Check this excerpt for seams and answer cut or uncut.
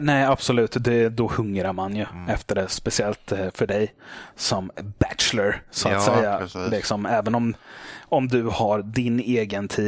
uncut